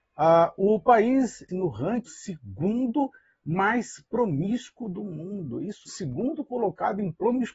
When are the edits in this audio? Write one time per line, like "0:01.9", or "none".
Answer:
0:01.5
0:02.1
0:05.9

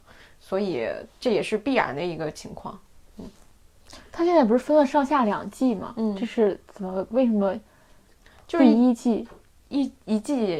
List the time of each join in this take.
none

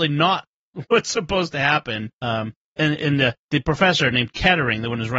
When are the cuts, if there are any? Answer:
0:02.1

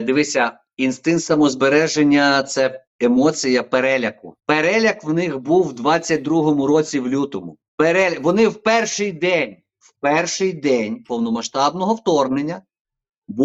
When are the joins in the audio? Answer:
0:04.4
0:07.7

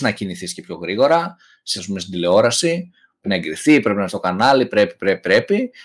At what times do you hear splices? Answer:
0:01.8
0:03.2
0:04.1

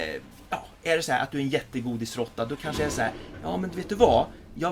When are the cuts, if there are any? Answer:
none

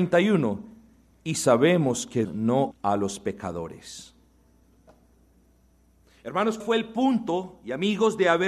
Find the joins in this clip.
0:02.2
0:02.7
0:06.6

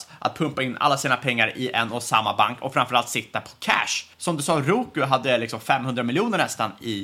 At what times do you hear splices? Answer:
0:04.1

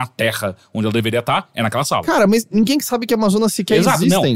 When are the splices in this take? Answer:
none

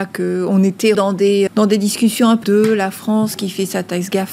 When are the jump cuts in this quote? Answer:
0:00.9
0:01.5
0:02.4

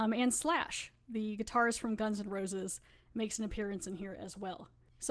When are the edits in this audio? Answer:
none

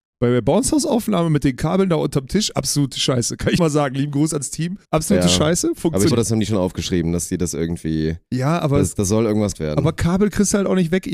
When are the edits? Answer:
0:03.6
0:04.8
0:06.1
0:09.5

